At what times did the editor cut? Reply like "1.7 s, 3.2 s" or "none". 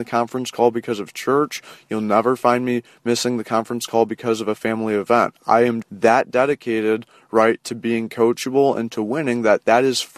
5.8 s